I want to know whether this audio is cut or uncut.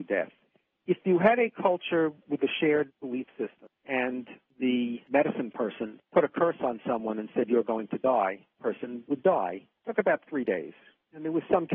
cut